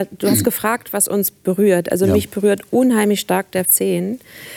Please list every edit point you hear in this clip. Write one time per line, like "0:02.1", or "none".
0:03.6